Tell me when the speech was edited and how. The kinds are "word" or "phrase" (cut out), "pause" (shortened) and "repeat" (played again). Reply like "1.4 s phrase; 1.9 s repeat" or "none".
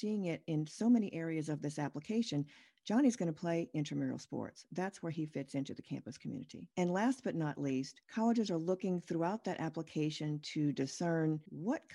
none